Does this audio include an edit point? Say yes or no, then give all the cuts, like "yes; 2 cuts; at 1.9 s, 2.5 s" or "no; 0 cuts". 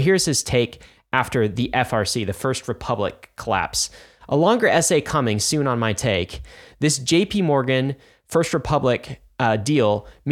no; 0 cuts